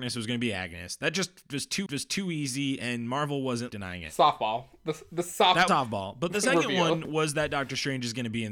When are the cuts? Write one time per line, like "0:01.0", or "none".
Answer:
0:01.9
0:03.7
0:05.7